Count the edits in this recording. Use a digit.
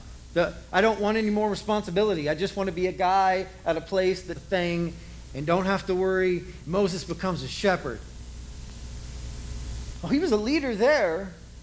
1